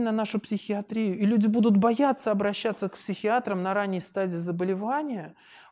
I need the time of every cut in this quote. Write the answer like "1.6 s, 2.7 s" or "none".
none